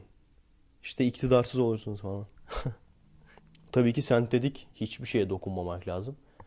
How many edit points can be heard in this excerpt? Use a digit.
1